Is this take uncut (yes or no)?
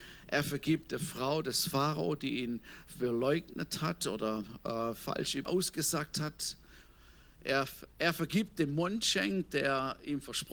no